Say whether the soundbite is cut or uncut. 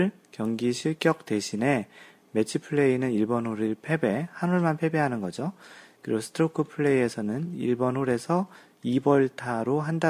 uncut